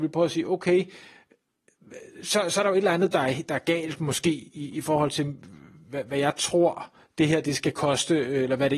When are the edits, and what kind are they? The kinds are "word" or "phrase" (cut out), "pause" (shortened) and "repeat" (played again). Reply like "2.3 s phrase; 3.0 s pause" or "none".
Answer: none